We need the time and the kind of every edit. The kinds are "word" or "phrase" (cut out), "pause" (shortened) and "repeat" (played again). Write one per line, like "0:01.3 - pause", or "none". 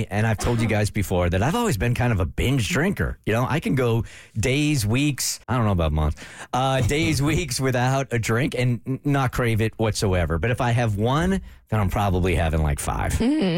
0:05.4 - pause